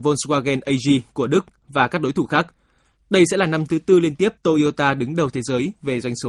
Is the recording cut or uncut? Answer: cut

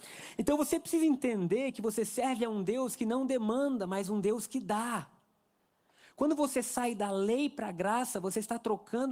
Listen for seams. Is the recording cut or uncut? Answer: uncut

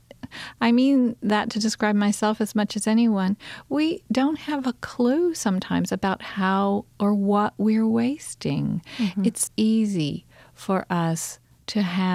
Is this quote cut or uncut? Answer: cut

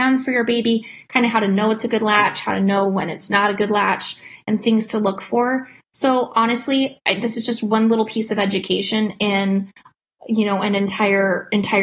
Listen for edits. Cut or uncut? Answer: uncut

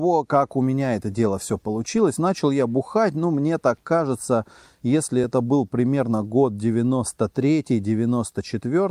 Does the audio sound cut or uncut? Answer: uncut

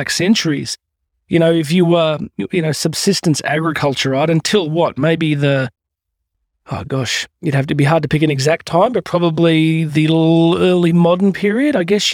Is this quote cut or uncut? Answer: uncut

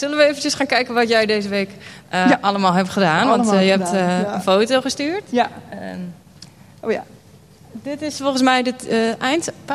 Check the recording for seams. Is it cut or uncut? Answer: uncut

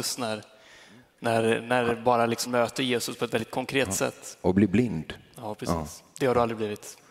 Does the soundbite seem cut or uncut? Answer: cut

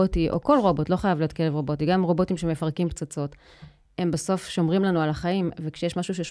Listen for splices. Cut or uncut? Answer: uncut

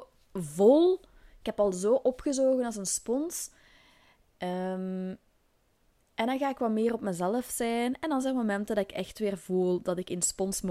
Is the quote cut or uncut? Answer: uncut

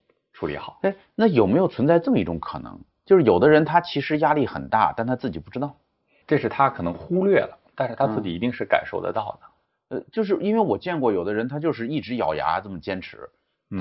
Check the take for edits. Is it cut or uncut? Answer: cut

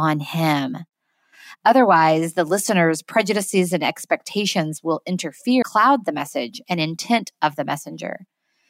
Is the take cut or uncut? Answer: cut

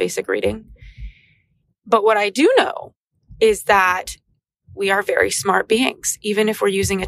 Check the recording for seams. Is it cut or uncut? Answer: uncut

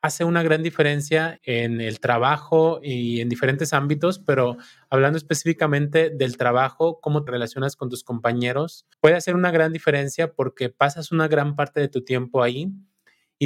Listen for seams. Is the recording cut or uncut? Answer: cut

